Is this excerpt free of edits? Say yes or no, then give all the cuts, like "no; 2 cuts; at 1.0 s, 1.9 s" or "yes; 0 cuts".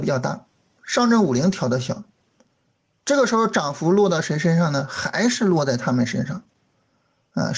no; 1 cut; at 3.0 s